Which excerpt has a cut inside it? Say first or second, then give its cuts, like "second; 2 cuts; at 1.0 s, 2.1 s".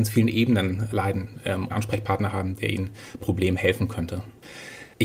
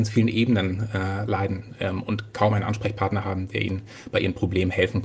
first; 3 cuts; at 0.9 s, 1.7 s, 3.2 s